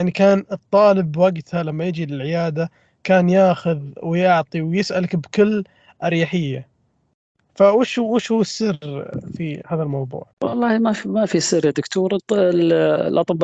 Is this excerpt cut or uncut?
cut